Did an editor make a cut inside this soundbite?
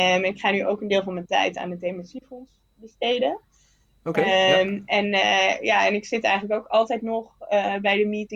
no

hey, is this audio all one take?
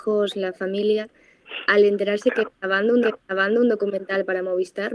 no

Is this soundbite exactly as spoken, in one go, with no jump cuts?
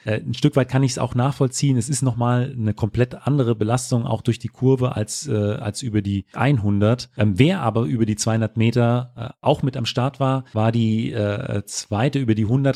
yes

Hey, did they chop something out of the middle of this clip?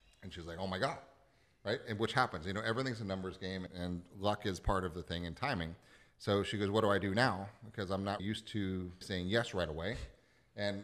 yes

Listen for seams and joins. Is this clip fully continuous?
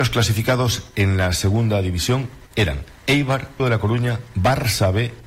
no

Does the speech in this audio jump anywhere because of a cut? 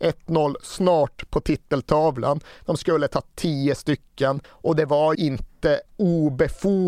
yes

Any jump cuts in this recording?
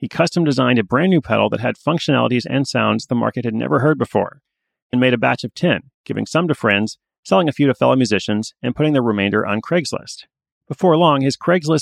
yes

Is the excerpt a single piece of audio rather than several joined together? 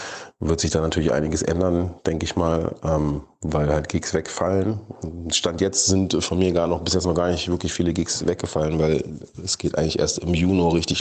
yes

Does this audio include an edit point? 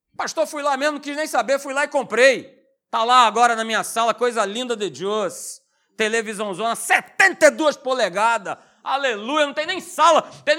no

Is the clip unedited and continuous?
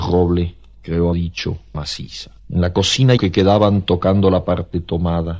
no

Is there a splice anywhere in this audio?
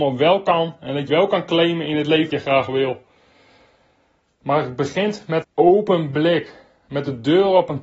yes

